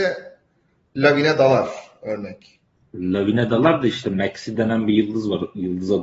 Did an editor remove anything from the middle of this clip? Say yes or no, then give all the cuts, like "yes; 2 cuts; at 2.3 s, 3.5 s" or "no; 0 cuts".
no; 0 cuts